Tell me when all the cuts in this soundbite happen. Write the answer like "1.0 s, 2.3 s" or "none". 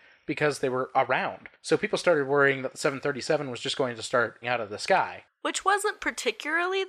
4.4 s